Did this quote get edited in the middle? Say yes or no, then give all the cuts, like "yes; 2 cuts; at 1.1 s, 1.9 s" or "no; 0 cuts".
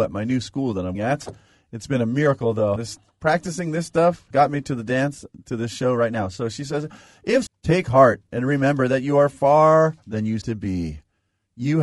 yes; 6 cuts; at 0.9 s, 2.8 s, 4.3 s, 7.5 s, 10.0 s, 10.4 s